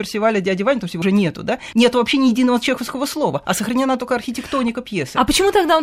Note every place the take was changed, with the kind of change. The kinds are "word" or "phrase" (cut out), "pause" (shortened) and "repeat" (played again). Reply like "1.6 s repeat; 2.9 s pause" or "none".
1.0 s word; 1.7 s word